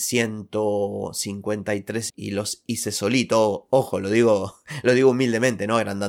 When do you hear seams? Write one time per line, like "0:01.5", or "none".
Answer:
0:02.1